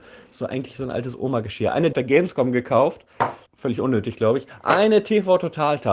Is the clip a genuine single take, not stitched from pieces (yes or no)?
no